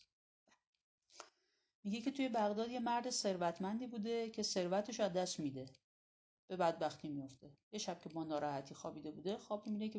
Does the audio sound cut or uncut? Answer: cut